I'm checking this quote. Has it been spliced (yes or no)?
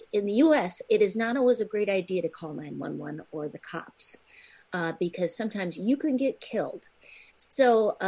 no